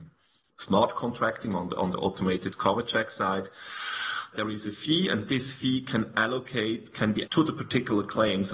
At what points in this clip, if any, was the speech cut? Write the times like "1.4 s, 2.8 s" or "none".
4.3 s, 7.3 s